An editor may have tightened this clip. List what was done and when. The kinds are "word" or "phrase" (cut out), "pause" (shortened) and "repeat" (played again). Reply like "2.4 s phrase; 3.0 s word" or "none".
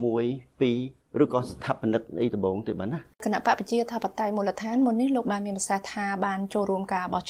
3.1 s pause